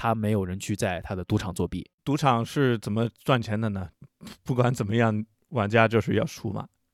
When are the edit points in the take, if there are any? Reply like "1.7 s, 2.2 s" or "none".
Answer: 2.0 s, 5.3 s